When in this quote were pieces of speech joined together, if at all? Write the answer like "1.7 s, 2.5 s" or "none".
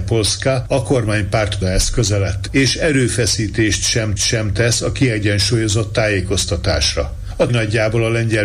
1.6 s, 4.2 s, 7.5 s